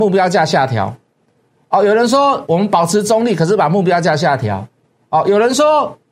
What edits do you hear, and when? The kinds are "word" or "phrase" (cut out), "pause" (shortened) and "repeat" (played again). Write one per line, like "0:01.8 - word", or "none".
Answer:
none